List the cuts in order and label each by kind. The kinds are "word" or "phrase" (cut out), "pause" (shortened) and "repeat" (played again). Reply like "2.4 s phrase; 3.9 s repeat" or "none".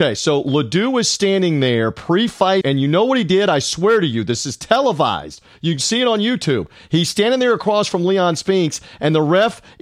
2.6 s word

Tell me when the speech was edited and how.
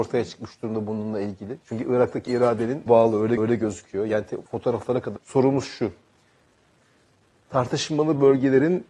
1.6 s pause; 2.3 s word; 2.9 s phrase; 3.4 s repeat; 4.5 s pause; 5.2 s phrase

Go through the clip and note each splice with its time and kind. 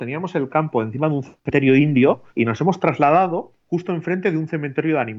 2.3 s pause; 3.6 s pause

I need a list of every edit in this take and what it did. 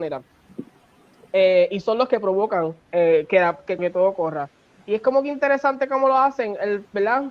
3.8 s word

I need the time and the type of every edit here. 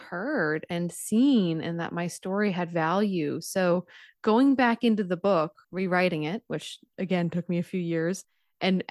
5.6 s pause

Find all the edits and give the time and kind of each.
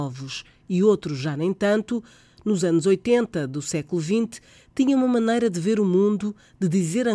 none

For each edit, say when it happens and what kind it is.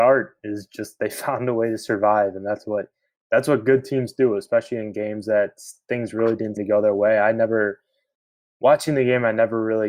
6.6 s word

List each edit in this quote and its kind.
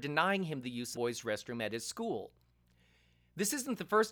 0.9 s phrase

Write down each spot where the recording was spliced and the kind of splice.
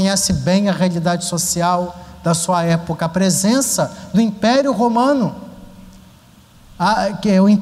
none

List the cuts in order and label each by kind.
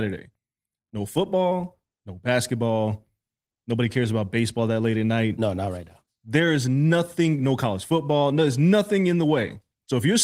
none

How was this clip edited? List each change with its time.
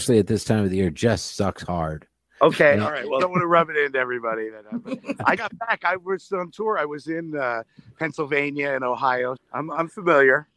3.2 s phrase; 5.4 s word; 9.4 s word

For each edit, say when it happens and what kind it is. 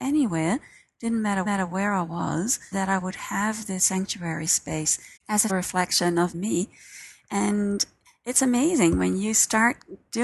1.5 s repeat; 2.7 s word; 3.8 s word; 5.2 s pause; 5.5 s word; 6.3 s phrase

